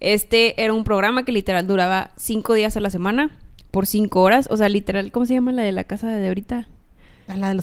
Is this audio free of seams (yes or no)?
yes